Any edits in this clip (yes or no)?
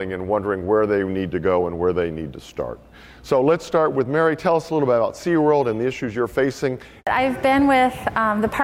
no